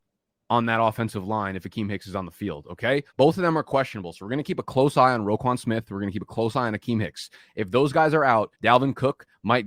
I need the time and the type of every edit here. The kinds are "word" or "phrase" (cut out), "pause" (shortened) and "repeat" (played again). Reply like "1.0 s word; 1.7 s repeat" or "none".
3.1 s pause; 8.5 s pause

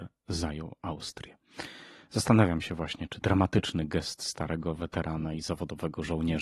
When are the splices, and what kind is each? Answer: 3.2 s word

